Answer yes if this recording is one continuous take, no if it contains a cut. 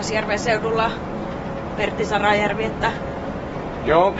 yes